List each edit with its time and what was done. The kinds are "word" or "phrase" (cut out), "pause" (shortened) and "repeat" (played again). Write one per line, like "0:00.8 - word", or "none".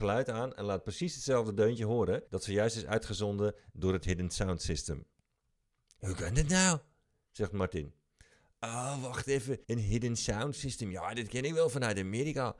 0:02.3 - pause
0:09.6 - pause